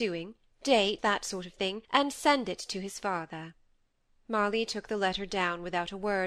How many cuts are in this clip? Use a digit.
3